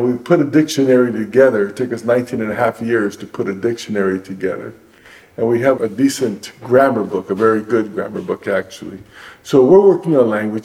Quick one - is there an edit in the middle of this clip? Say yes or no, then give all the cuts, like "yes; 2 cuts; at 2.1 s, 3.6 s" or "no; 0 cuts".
no; 0 cuts